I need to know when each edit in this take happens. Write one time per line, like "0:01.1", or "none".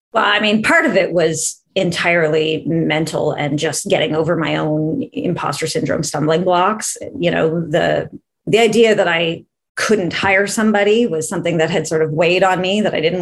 0:01.7